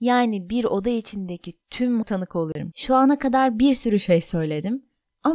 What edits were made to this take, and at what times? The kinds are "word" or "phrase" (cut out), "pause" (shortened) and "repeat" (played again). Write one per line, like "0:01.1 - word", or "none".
0:02.0 - word